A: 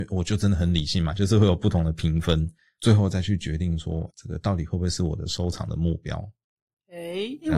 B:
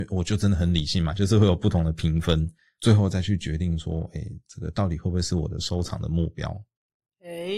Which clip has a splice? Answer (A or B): A